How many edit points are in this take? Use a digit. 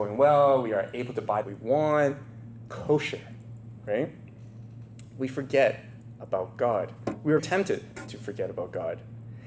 3